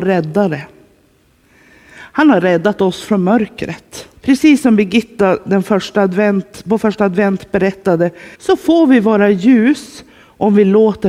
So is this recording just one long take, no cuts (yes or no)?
no